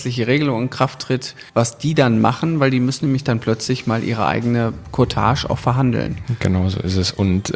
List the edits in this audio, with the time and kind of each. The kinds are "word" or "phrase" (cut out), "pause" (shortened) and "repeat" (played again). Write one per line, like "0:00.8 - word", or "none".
0:01.5 - pause